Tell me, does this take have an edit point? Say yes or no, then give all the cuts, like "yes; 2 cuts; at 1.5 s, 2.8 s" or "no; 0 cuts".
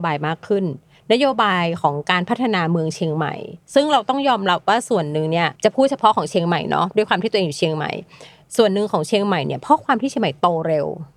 yes; 1 cut; at 5.6 s